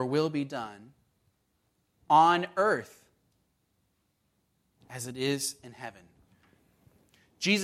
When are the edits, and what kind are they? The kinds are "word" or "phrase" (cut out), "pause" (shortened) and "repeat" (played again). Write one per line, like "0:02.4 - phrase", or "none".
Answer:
none